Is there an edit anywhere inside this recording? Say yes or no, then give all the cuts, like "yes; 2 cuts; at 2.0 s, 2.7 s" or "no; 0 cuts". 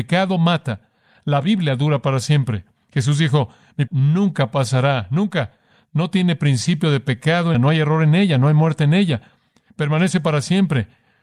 yes; 2 cuts; at 3.9 s, 7.5 s